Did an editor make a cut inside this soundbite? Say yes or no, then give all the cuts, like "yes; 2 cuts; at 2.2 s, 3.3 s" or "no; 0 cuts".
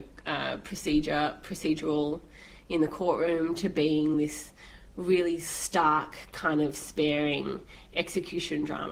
no; 0 cuts